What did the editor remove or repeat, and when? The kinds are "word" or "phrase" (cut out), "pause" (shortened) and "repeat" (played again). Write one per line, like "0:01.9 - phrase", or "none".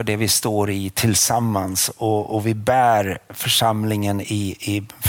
none